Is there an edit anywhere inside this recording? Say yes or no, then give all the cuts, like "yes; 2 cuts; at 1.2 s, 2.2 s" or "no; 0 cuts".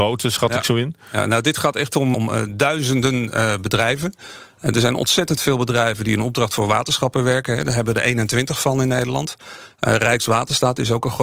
yes; 1 cut; at 2.1 s